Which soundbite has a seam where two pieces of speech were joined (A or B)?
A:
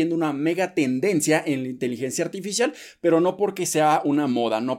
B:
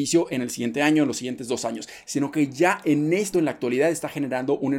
B